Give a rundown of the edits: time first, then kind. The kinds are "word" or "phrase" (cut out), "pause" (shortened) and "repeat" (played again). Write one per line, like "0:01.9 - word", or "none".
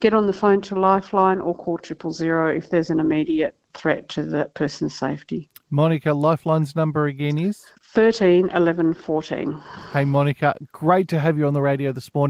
0:03.7 - word
0:07.8 - pause